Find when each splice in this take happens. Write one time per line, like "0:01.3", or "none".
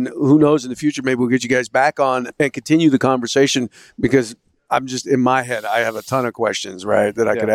none